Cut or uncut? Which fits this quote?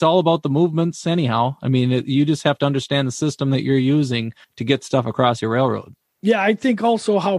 uncut